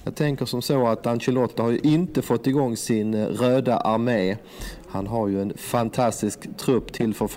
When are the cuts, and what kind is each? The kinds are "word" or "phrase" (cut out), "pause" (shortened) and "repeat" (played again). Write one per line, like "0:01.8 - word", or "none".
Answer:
none